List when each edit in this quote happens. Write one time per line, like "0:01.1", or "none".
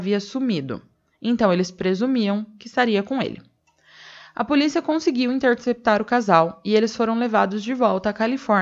none